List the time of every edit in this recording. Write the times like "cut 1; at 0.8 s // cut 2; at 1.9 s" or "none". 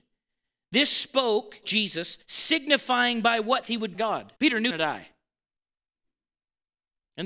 cut 1; at 1.6 s // cut 2; at 2.2 s // cut 3; at 3.6 s // cut 4; at 3.9 s // cut 5; at 4.4 s // cut 6; at 4.7 s